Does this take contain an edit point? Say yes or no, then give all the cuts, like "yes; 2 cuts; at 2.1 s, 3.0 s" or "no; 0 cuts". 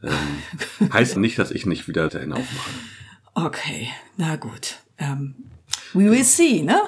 yes; 2 cuts; at 1.2 s, 2.1 s